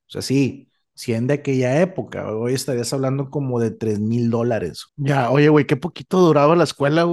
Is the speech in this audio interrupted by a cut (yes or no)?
yes